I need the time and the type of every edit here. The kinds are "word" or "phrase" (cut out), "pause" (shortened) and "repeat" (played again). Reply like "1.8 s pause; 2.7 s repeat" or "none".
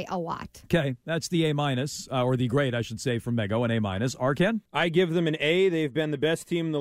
4.7 s pause